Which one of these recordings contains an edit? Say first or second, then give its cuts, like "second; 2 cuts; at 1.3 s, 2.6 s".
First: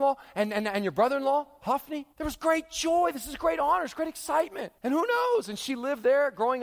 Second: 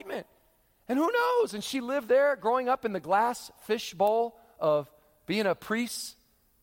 first; 2 cuts; at 2.1 s, 4.8 s